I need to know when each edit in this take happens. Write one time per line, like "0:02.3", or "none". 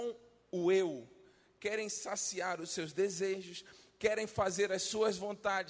none

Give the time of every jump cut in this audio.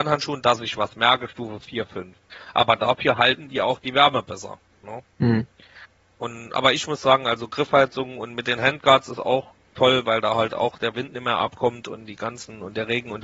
0:04.7

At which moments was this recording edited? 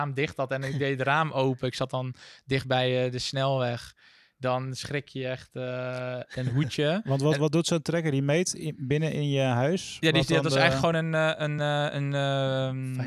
none

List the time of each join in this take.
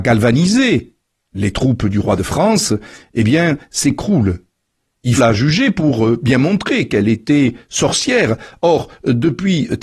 0:05.2

